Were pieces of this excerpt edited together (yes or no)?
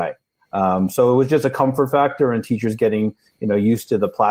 no